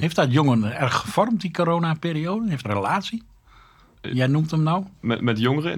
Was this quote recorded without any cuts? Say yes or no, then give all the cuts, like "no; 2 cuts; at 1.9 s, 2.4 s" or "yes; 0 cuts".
no; 1 cut; at 2.6 s